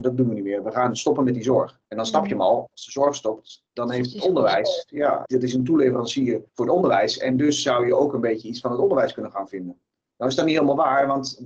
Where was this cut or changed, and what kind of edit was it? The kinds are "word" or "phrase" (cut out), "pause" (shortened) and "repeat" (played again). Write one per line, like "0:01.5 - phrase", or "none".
0:01.9 - pause
0:03.7 - pause
0:05.3 - word
0:06.5 - pause